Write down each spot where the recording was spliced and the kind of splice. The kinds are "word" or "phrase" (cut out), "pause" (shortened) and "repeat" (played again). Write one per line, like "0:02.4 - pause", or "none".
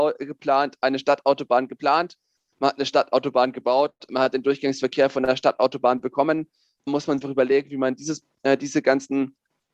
0:06.9 - word
0:07.2 - phrase